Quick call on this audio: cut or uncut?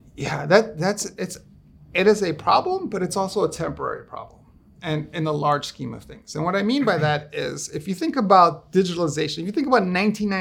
uncut